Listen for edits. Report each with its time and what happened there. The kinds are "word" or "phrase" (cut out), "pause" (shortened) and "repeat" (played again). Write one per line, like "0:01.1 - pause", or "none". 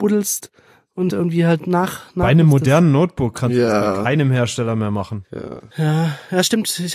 0:01.1 - word